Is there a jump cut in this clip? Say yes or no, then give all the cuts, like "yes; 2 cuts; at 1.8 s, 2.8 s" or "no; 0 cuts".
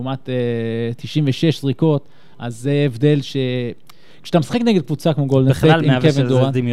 no; 0 cuts